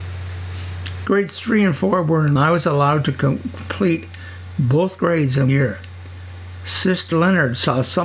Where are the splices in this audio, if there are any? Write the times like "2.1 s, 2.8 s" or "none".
2.4 s, 5.5 s, 7.1 s